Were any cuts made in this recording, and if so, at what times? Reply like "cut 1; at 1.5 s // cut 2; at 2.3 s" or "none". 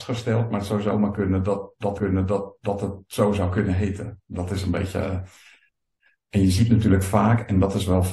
cut 1; at 2.0 s